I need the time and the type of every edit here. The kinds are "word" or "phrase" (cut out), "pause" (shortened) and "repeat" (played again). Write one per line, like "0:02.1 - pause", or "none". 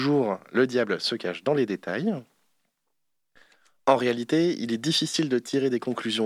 none